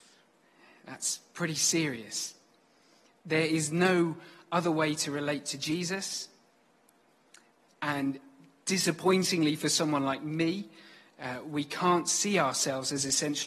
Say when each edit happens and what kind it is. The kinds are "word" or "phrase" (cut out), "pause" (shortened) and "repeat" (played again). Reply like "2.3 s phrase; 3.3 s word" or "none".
none